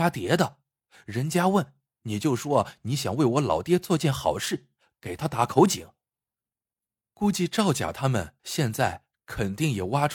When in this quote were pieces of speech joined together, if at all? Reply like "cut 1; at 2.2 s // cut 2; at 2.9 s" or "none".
cut 1; at 8.4 s